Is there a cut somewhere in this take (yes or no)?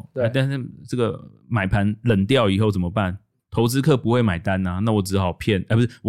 yes